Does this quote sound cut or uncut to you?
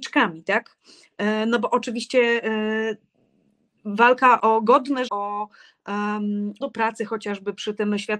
cut